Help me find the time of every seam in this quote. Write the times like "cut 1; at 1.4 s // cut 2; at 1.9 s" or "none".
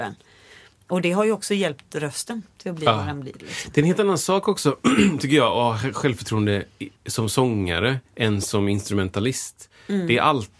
cut 1; at 7.0 s // cut 2; at 8.1 s